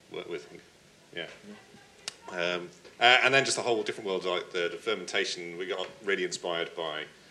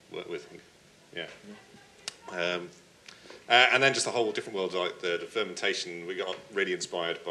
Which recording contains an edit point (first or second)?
first